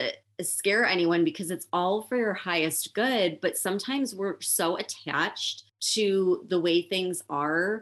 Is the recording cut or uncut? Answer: cut